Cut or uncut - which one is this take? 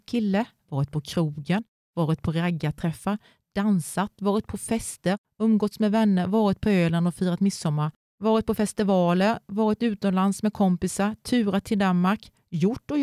uncut